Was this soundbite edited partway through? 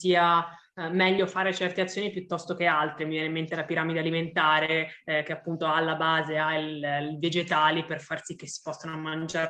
no; 0 cuts

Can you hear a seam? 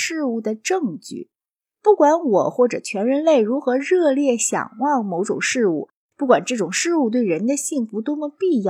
no; 0 cuts

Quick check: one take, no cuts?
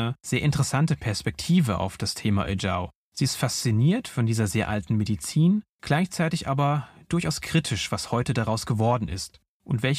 no; 2 cuts; at 3.0 s, 5.7 s

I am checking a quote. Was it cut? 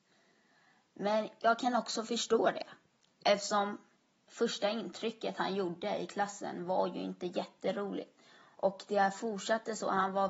no; 0 cuts

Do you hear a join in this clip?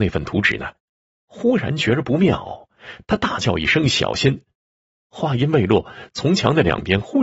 no; 0 cuts

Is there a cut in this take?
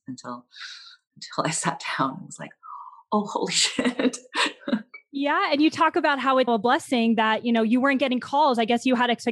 yes; 1 cut; at 6.5 s

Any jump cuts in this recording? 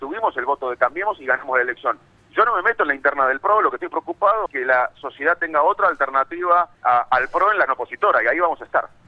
yes; 3 cuts; at 4.5 s, 6.7 s, 7.7 s

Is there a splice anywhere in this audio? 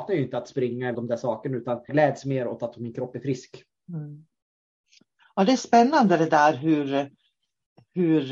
yes; 2 cuts; at 0.9 s, 1.9 s

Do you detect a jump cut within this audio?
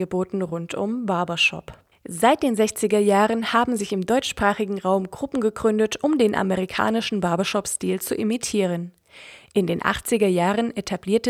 yes; 1 cut; at 1.9 s

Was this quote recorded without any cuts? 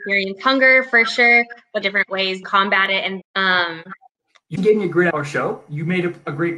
no; 5 cuts; at 1.8 s, 2.4 s, 3.2 s, 4.6 s, 5.1 s

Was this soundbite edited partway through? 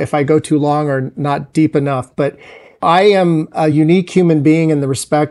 no; 0 cuts

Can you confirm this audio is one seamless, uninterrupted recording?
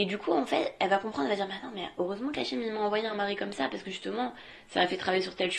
yes; 0 cuts

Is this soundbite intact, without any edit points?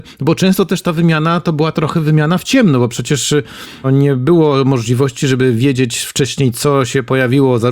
no; 2 cuts; at 1.7 s, 3.8 s

